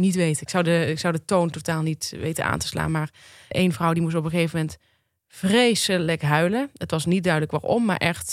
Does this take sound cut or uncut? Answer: cut